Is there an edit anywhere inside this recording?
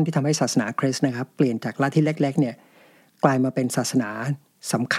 no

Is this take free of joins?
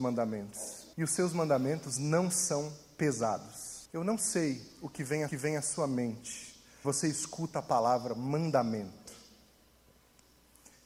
no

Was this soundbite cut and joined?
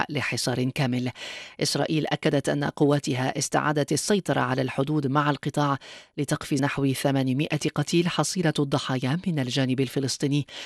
yes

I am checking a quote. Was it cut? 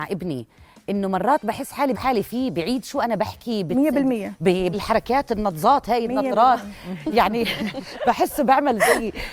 yes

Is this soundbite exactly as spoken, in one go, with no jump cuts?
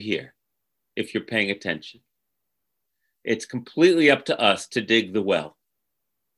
yes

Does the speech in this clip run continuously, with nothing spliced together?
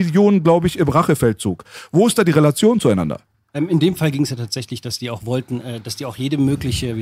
no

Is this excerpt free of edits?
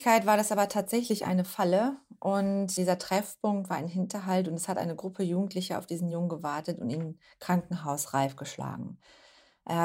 yes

